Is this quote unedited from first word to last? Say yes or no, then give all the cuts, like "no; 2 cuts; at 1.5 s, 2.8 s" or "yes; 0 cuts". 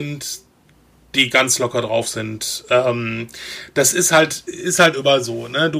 yes; 0 cuts